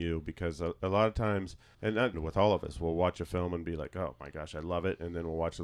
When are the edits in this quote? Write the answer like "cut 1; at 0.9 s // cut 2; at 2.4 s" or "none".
cut 1; at 1.7 s // cut 2; at 2.1 s